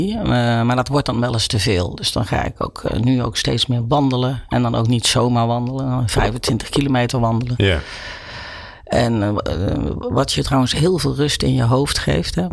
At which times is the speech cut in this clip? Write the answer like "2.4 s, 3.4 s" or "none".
none